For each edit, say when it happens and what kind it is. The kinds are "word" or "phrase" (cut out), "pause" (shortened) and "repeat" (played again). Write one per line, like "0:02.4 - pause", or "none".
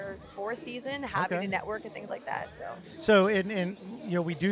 none